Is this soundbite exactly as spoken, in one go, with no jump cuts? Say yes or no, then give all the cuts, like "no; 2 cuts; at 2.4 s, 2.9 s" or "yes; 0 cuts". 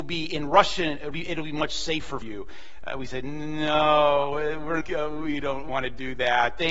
no; 4 cuts; at 1.1 s, 2.2 s, 4.8 s, 5.7 s